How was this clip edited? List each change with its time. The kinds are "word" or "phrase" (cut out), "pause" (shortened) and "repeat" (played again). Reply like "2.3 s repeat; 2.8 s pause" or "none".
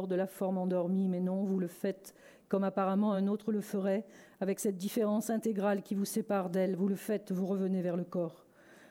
none